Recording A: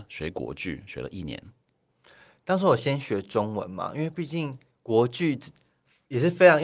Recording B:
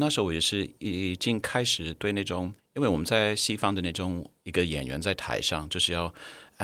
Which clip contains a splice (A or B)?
B